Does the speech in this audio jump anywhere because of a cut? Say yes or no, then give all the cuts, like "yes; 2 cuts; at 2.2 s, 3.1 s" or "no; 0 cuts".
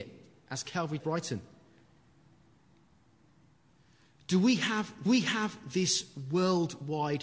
yes; 2 cuts; at 1.0 s, 5.1 s